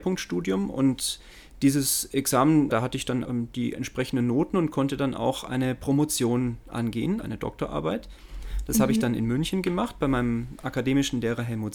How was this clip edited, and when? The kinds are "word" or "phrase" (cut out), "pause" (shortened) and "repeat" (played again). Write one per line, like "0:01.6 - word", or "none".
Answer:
0:02.7 - word
0:03.2 - word
0:07.2 - word